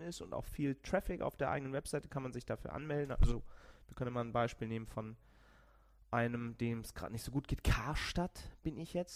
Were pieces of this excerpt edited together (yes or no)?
no